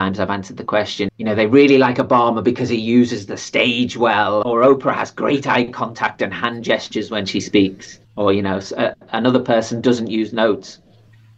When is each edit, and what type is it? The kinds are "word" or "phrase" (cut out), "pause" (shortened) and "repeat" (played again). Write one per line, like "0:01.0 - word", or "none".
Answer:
0:01.1 - word
0:04.4 - word
0:08.0 - pause